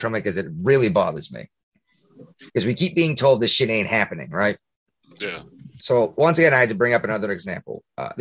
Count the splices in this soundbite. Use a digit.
2